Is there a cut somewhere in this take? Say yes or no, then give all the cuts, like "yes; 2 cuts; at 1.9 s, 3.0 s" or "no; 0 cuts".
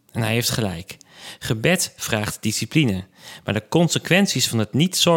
no; 0 cuts